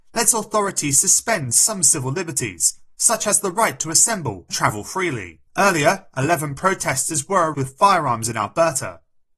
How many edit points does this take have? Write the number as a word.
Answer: three